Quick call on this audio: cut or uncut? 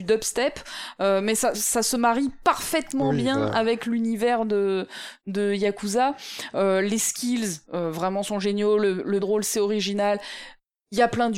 cut